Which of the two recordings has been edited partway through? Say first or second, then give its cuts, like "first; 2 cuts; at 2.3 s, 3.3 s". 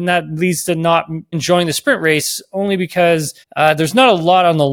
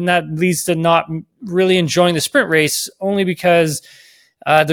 first; 2 cuts; at 1.3 s, 3.4 s